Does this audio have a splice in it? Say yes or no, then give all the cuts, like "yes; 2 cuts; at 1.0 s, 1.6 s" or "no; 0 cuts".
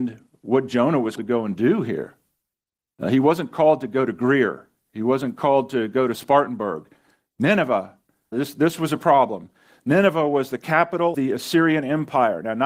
yes; 3 cuts; at 1.2 s, 8.3 s, 11.1 s